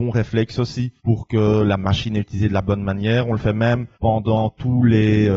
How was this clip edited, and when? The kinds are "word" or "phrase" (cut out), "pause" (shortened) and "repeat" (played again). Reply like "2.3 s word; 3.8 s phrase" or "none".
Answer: 1.0 s pause; 3.9 s pause